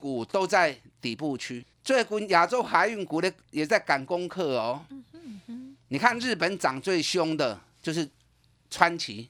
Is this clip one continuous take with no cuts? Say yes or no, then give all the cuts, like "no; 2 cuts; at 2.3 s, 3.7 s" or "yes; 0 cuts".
no; 1 cut; at 1.7 s